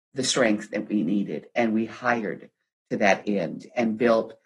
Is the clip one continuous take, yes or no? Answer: yes